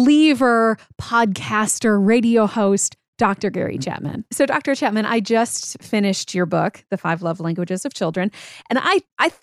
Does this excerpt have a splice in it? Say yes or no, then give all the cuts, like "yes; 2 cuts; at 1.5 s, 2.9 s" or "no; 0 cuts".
yes; 1 cut; at 4.3 s